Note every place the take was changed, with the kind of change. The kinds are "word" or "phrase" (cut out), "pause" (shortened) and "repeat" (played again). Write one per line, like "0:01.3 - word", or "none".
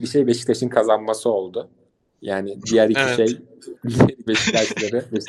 0:01.9 - pause
0:03.8 - pause
0:04.3 - word